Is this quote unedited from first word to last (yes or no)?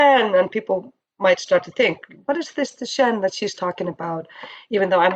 yes